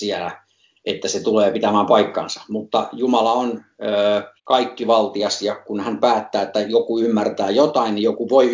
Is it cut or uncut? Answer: cut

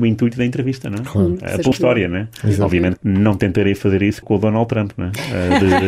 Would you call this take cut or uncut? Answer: cut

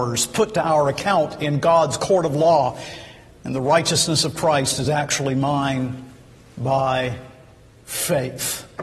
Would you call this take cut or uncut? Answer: uncut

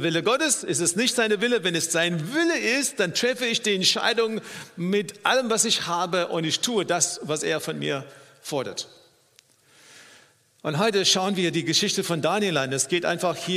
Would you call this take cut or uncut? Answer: uncut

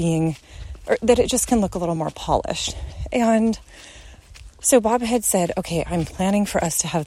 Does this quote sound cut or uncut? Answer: uncut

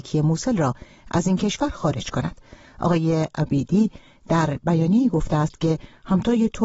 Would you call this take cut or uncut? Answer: uncut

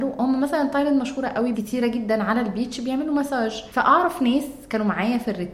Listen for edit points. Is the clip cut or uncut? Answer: cut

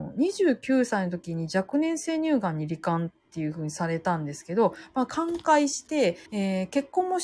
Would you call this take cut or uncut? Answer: cut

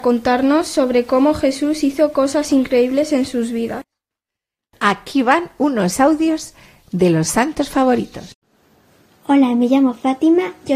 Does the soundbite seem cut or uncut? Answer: uncut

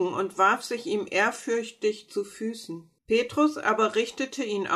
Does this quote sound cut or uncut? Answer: cut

